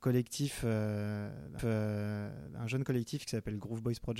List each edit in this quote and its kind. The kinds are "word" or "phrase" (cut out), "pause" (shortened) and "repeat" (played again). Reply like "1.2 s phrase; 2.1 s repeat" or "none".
1.6 s repeat